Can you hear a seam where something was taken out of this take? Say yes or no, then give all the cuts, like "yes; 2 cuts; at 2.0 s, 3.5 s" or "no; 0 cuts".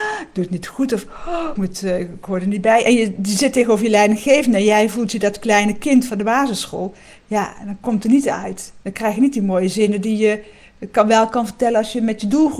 yes; 1 cut; at 1.6 s